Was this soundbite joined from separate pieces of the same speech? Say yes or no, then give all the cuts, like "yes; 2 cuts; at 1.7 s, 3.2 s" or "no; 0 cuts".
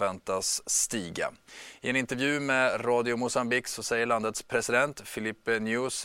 no; 0 cuts